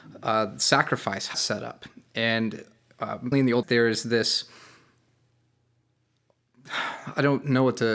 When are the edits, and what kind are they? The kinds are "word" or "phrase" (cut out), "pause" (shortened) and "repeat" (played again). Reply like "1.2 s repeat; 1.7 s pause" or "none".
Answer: 1.3 s word; 3.3 s word; 3.6 s phrase